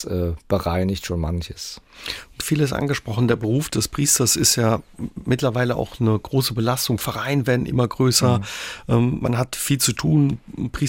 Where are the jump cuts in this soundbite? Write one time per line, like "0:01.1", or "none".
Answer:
0:02.4